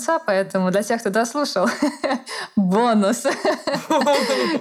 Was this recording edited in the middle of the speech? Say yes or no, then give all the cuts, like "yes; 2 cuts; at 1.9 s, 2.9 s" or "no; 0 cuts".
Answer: no; 0 cuts